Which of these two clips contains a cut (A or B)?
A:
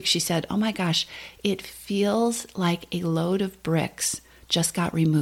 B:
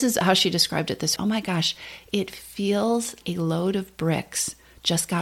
B